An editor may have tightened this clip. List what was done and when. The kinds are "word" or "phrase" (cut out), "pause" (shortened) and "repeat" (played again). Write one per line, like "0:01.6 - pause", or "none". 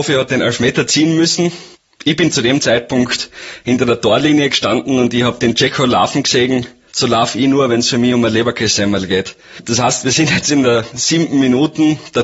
none